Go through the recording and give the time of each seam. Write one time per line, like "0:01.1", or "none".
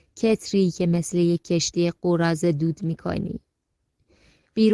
none